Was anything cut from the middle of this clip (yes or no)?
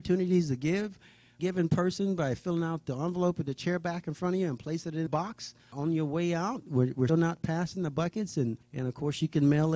yes